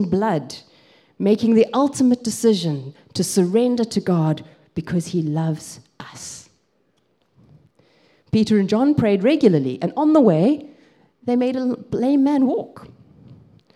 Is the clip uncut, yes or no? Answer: yes